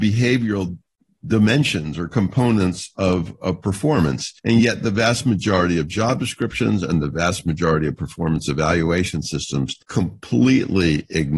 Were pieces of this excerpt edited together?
yes; 2 cuts; at 4.4 s, 9.8 s

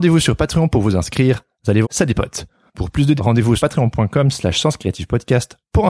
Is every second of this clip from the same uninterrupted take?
no; 3 cuts; at 1.8 s, 3.2 s, 3.6 s

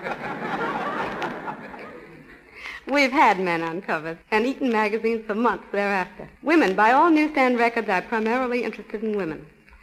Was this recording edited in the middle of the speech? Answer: yes; 2 cuts; at 4.2 s, 6.4 s

